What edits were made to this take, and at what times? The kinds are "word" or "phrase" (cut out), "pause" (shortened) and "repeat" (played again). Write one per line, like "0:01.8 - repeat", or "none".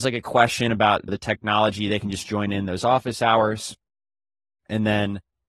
none